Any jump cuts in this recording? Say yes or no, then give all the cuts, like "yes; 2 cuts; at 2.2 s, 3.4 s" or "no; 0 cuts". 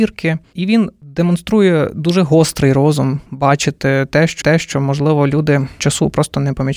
yes; 3 cuts; at 3.3 s, 4.4 s, 5.8 s